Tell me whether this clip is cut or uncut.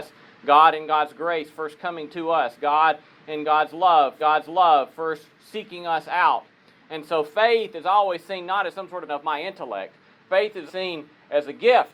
cut